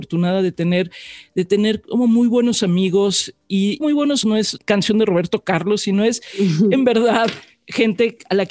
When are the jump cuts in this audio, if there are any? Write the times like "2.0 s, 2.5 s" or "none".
3.8 s, 4.2 s